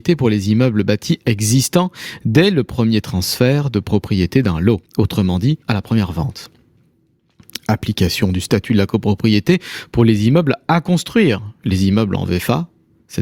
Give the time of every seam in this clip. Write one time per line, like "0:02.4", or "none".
0:04.9
0:05.6